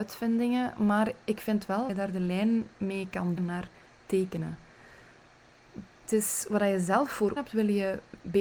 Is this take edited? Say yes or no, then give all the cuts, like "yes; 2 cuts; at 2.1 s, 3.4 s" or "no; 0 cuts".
yes; 3 cuts; at 1.9 s, 3.4 s, 7.4 s